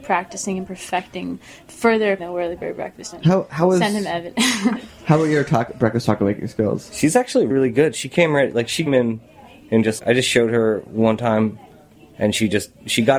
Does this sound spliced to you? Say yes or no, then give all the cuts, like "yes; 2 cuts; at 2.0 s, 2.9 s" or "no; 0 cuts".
yes; 5 cuts; at 2.2 s, 3.1 s, 7.5 s, 8.9 s, 10.0 s